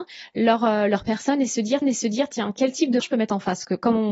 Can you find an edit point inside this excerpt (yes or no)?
yes